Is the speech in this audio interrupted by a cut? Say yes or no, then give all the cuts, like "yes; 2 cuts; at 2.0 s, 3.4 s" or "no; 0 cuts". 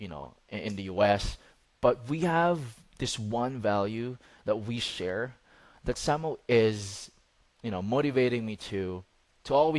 no; 0 cuts